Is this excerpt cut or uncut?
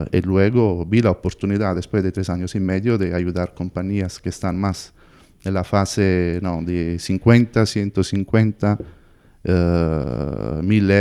uncut